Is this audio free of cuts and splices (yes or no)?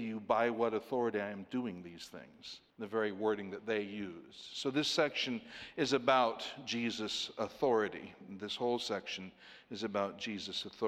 no